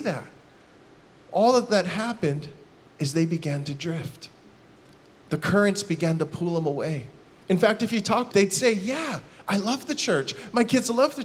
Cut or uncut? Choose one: cut